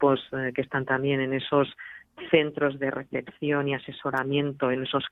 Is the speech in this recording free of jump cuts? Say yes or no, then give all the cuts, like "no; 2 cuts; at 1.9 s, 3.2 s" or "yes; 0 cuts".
yes; 0 cuts